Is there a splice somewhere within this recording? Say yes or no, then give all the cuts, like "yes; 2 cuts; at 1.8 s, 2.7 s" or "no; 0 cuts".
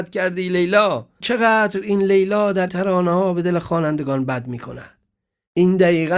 yes; 2 cuts; at 1.2 s, 2.7 s